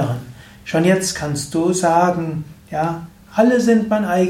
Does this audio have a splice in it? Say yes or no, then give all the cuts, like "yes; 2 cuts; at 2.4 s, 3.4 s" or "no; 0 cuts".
no; 0 cuts